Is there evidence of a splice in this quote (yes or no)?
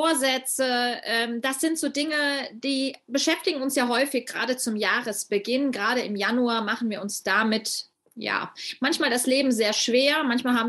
no